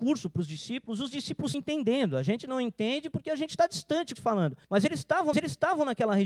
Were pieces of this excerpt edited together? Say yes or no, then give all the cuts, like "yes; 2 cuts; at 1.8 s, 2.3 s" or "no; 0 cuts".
yes; 4 cuts; at 1.5 s, 4.1 s, 4.6 s, 5.3 s